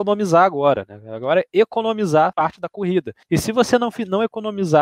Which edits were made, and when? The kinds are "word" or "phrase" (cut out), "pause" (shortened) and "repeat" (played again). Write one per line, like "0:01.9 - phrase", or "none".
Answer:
0:02.3 - word
0:03.2 - pause

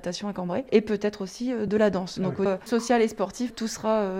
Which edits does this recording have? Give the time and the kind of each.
0:02.5 - word

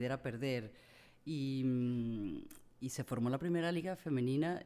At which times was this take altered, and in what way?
none

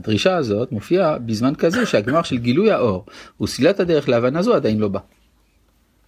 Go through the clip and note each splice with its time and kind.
none

